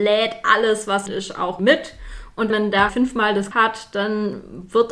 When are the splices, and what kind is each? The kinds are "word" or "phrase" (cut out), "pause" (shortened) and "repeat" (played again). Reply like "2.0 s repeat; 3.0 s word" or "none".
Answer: 1.1 s phrase; 1.6 s word; 2.5 s word; 2.9 s word; 3.5 s phrase